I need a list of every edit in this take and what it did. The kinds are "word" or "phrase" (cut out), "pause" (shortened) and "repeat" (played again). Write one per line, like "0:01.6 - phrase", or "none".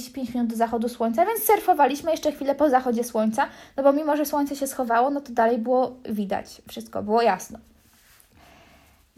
none